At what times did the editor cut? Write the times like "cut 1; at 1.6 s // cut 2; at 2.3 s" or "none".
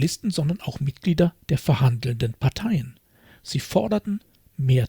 none